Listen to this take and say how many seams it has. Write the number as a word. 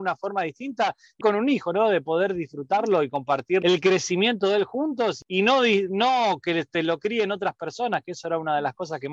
one